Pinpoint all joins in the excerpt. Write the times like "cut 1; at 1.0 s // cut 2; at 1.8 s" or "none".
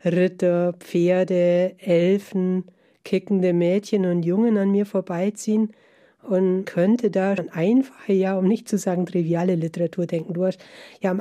cut 1; at 6.6 s // cut 2; at 7.4 s